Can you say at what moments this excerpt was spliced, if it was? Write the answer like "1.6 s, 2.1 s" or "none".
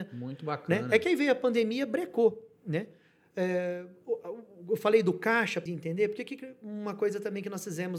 5.7 s